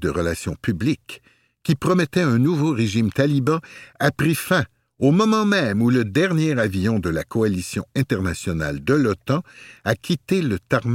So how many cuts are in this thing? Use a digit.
0